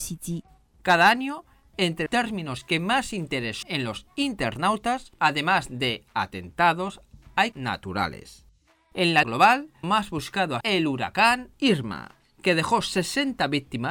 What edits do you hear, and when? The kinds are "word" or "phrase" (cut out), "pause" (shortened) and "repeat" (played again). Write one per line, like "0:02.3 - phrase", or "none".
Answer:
0:02.1 - word
0:03.6 - word
0:07.5 - word
0:09.2 - word
0:09.8 - word
0:10.6 - word